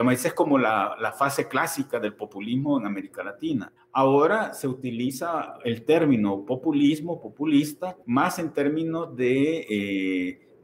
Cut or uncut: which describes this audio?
cut